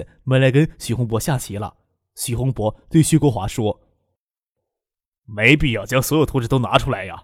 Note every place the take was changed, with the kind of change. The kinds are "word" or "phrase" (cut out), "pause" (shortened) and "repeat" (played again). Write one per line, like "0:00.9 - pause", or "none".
none